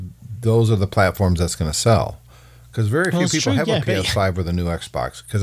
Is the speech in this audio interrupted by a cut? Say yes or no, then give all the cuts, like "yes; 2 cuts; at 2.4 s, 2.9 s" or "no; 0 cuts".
no; 0 cuts